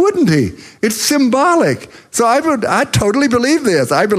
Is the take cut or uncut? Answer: uncut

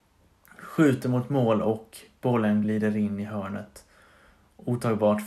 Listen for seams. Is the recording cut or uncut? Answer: uncut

